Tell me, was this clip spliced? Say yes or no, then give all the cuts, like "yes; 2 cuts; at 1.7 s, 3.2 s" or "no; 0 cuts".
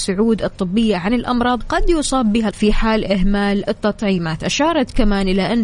yes; 3 cuts; at 1.6 s, 2.5 s, 3.7 s